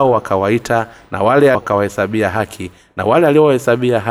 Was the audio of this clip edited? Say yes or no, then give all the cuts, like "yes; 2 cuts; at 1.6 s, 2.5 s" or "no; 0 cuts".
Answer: yes; 1 cut; at 1.5 s